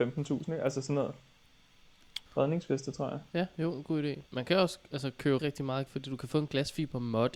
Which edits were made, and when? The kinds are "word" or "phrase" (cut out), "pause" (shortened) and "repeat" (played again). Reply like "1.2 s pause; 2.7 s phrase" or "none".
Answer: 2.3 s pause; 4.3 s pause; 5.4 s word; 5.9 s word